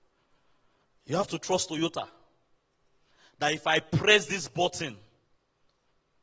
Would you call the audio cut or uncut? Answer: uncut